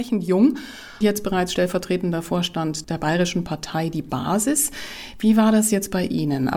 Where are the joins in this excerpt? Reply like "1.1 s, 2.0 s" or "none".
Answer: 1.0 s